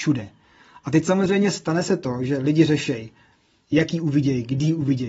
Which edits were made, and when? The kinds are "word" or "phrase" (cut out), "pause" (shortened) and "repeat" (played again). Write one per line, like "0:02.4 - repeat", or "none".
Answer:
none